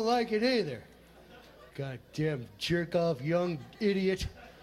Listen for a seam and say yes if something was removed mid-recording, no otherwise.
yes